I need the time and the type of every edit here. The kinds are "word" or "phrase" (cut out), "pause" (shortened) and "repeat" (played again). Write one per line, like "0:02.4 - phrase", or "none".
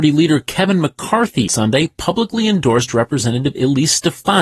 0:01.5 - word